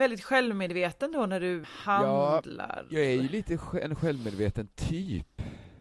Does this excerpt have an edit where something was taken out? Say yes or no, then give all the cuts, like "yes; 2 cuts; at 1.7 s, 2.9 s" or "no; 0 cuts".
yes; 1 cut; at 1.6 s